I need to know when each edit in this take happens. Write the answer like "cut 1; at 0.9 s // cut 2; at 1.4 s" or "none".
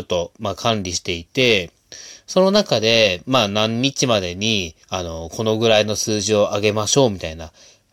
cut 1; at 4.8 s